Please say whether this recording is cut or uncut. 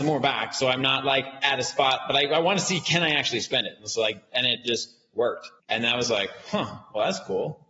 cut